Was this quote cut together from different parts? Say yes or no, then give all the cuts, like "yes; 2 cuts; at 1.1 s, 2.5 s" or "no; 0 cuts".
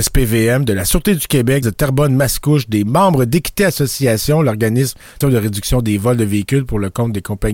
yes; 2 cuts; at 1.6 s, 5.2 s